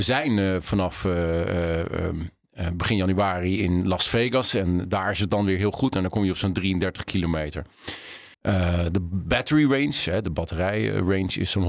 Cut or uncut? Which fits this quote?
cut